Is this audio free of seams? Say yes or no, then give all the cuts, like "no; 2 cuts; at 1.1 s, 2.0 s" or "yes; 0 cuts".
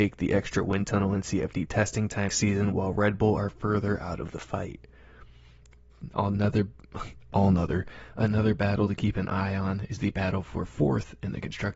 no; 1 cut; at 2.3 s